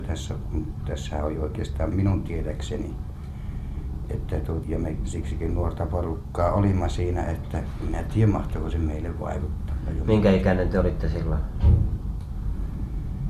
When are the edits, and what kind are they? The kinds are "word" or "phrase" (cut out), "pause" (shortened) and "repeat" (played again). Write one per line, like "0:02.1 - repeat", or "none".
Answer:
0:01.9 - word
0:04.6 - word